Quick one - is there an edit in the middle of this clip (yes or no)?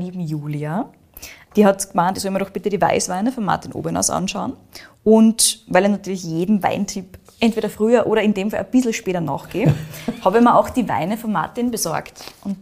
no